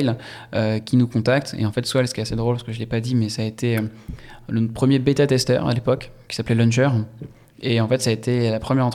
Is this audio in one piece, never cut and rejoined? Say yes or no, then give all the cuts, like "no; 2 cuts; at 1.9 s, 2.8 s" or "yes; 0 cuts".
yes; 0 cuts